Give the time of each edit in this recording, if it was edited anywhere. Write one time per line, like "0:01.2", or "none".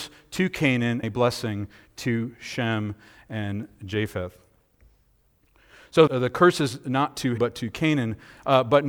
0:01.0
0:06.1
0:07.4